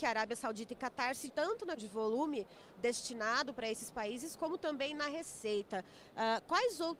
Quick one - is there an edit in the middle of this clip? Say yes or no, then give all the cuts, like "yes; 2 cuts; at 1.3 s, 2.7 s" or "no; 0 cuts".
yes; 2 cuts; at 1.3 s, 1.8 s